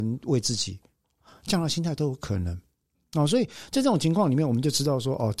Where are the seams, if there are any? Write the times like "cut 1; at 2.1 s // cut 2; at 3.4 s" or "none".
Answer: none